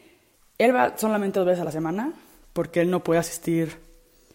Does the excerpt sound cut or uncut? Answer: uncut